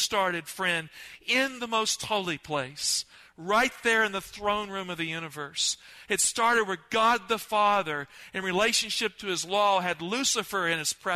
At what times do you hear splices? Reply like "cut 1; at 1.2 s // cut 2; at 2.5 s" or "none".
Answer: none